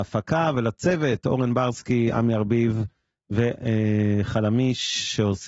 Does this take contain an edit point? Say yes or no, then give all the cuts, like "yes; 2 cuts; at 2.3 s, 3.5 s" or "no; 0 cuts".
no; 0 cuts